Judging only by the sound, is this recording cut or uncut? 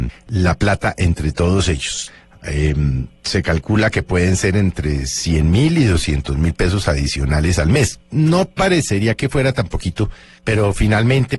uncut